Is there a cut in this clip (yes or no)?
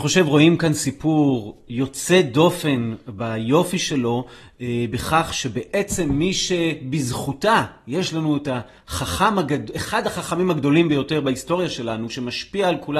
no